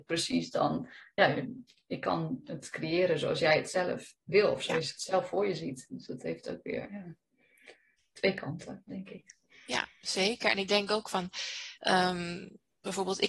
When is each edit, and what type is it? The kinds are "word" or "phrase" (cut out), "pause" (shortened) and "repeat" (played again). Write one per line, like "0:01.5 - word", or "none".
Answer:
0:11.8 - pause